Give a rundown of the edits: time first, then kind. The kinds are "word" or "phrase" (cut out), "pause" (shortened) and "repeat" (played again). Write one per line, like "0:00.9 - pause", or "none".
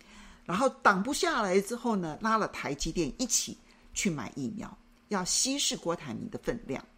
none